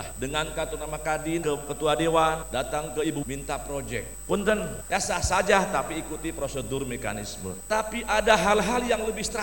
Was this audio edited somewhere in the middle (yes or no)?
yes